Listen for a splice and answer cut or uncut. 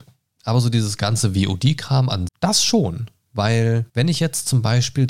cut